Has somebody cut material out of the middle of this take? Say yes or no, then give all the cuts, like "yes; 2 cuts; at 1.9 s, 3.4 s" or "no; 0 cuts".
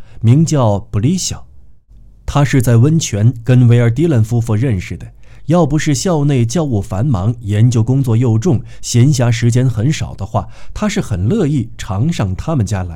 no; 0 cuts